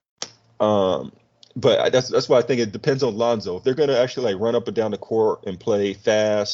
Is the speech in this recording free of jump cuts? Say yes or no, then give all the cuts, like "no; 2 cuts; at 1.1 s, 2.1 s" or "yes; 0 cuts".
yes; 0 cuts